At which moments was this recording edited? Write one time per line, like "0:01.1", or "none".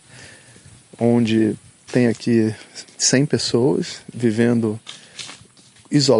0:01.9
0:03.0